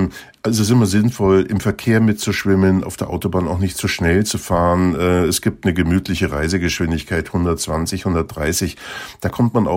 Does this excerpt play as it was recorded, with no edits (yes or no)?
yes